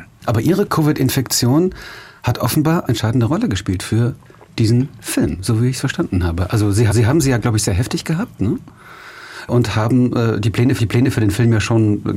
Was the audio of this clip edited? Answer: yes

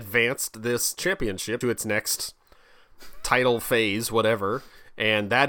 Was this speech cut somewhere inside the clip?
yes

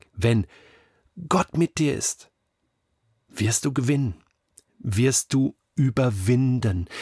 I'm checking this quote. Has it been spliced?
no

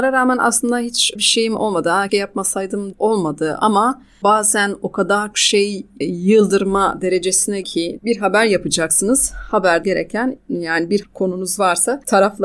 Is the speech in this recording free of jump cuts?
no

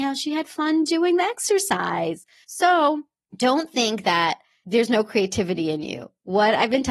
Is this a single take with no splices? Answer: yes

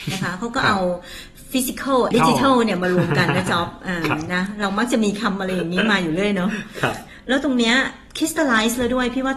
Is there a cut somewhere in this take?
yes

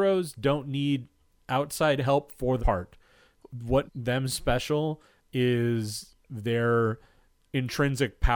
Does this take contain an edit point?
yes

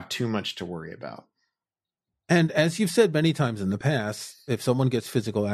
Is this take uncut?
yes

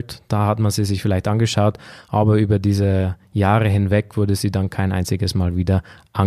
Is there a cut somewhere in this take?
no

